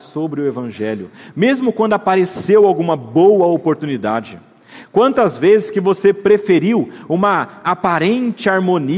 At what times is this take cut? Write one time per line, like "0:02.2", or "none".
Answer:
none